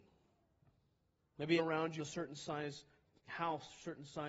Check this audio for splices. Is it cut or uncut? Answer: cut